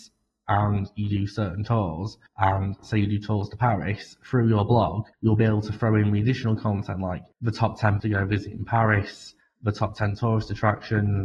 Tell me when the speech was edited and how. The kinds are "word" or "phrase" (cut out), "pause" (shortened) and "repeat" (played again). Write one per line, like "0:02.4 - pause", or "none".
0:02.3 - pause
0:05.1 - pause
0:07.3 - pause
0:08.0 - phrase
0:09.4 - pause